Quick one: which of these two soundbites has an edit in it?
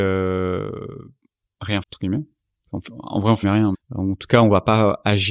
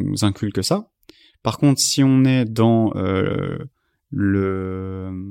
first; 3 cuts; at 1.8 s, 3.4 s, 3.7 s

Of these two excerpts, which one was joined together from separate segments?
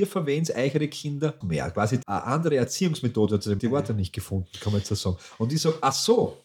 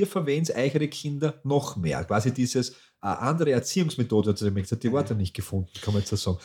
first; 3 cuts; at 1.4 s, 2.0 s, 3.6 s

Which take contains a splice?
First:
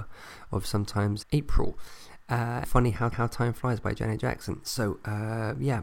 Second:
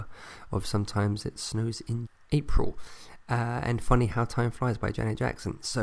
first; 3 cuts; at 1.2 s, 2.6 s, 3.1 s

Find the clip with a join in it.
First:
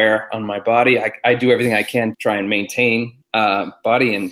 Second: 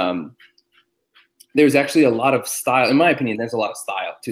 first; 2 cuts; at 2.1 s, 3.2 s

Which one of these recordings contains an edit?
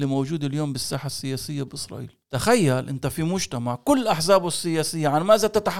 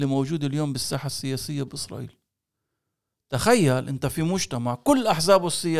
first; 1 cut; at 2.2 s

